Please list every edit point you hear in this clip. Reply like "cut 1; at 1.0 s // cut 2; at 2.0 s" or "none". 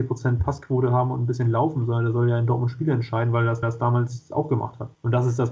cut 1; at 3.6 s